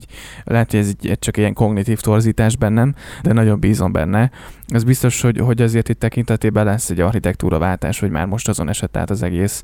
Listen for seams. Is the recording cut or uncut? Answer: cut